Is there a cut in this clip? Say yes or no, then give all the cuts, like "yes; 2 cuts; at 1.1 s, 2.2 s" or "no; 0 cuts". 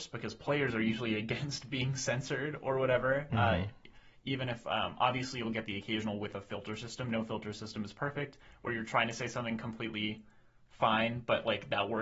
no; 0 cuts